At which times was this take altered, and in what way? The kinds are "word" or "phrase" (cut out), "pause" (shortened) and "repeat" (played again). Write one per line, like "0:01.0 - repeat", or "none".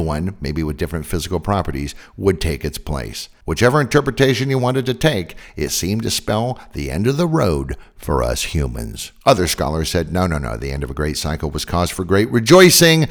none

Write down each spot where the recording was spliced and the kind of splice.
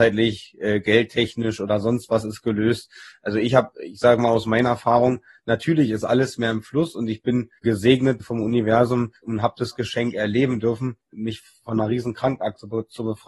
0:11.0 - pause

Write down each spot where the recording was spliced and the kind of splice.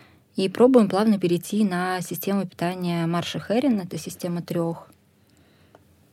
none

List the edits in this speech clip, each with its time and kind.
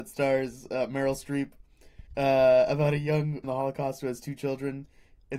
0:02.1 - pause
0:03.4 - word

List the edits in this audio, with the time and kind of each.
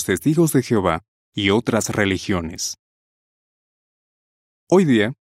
none

